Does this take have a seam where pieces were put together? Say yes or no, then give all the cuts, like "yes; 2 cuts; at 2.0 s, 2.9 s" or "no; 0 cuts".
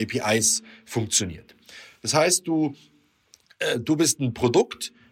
no; 0 cuts